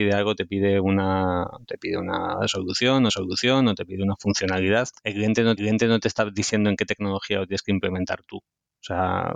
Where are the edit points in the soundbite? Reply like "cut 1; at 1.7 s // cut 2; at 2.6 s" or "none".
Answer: cut 1; at 3.1 s // cut 2; at 5.6 s